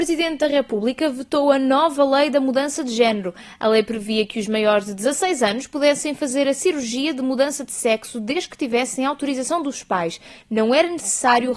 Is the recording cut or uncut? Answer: uncut